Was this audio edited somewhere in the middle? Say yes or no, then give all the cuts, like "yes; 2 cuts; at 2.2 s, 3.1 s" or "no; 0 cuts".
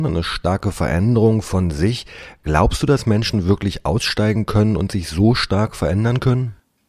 no; 0 cuts